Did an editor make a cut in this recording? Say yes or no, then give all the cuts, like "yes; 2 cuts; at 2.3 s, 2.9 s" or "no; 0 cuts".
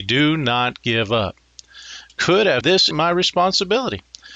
yes; 3 cuts; at 2.1 s, 2.6 s, 2.9 s